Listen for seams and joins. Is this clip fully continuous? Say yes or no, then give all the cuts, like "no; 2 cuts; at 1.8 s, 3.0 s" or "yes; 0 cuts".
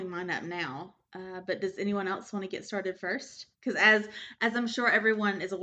no; 1 cut; at 3.5 s